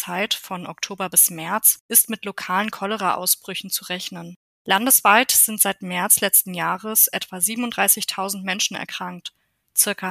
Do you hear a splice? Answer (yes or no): yes